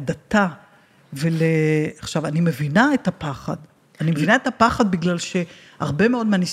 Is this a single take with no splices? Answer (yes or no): yes